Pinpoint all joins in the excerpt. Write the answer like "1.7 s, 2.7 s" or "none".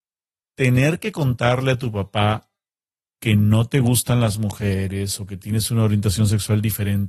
none